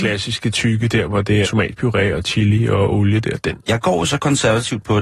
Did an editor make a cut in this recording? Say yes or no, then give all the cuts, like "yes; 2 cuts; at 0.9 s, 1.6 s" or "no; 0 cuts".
yes; 2 cuts; at 1.4 s, 3.6 s